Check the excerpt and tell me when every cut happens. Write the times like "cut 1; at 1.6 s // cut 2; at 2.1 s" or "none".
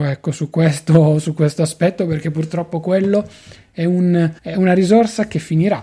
cut 1; at 4.4 s